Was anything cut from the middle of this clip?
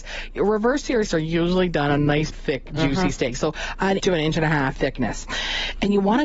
yes; 4 cuts; at 1.1 s, 2.3 s, 4.0 s, 4.7 s

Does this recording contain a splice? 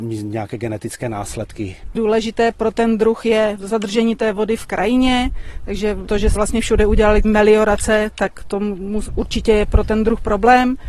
yes; 1 cut; at 6.4 s

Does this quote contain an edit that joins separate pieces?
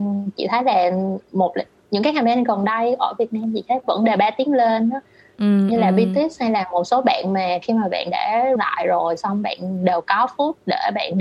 yes; 1 cut; at 8.6 s

